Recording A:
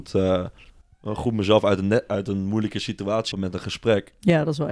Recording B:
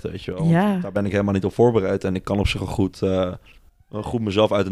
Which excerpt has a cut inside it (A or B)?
A